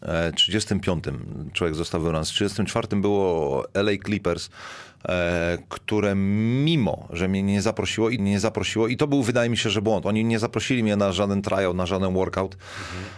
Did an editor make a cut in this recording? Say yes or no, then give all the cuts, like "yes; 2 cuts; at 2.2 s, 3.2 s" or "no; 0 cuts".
yes; 1 cut; at 8.2 s